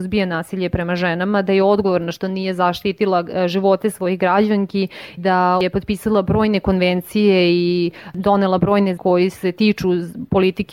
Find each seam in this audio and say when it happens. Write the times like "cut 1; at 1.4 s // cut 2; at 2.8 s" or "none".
cut 1; at 5.2 s // cut 2; at 9.0 s